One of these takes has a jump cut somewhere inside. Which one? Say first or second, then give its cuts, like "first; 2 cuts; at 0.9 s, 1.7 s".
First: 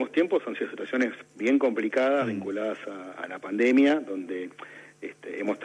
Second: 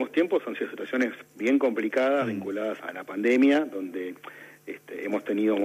second; 1 cut; at 2.8 s